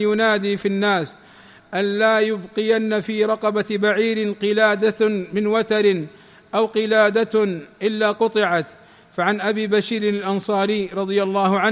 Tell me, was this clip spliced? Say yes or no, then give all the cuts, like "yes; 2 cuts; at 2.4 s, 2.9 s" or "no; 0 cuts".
no; 0 cuts